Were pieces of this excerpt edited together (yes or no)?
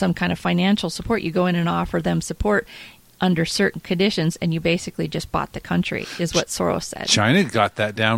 no